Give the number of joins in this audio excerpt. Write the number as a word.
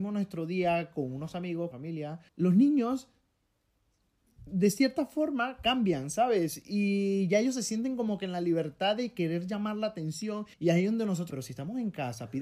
four